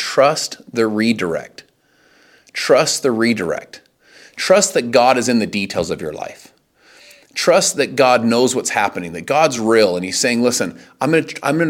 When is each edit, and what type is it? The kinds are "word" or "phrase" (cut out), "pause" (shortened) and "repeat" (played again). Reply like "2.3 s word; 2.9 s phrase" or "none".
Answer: none